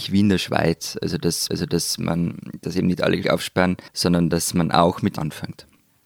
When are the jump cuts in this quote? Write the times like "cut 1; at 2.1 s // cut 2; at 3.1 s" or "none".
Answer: cut 1; at 1.5 s // cut 2; at 3.2 s // cut 3; at 3.9 s // cut 4; at 5.2 s